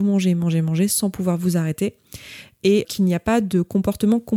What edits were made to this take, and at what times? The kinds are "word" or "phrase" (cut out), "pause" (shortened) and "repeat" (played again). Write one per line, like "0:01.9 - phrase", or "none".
0:02.8 - word